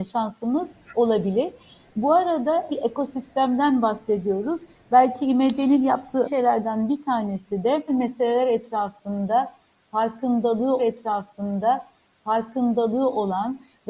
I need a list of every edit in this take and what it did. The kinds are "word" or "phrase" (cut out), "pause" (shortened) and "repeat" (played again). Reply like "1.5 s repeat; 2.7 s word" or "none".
2.7 s word; 6.2 s word; 7.9 s word; 10.8 s repeat